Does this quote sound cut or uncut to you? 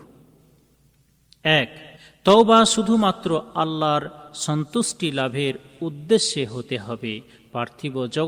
cut